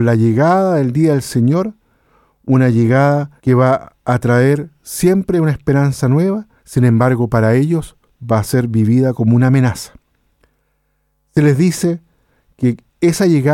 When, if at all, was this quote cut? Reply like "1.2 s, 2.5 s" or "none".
3.4 s, 6.6 s